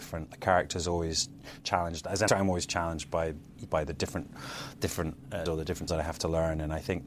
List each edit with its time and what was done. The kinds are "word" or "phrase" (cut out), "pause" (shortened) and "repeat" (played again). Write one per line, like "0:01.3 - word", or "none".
0:02.3 - word
0:03.7 - word
0:05.5 - word
0:05.9 - word